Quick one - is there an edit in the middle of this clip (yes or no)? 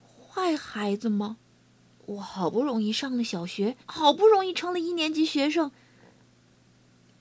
yes